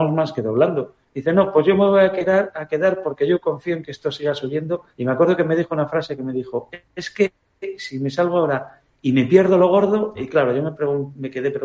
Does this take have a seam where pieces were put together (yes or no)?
yes